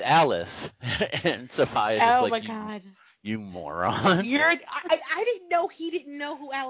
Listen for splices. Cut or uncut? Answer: uncut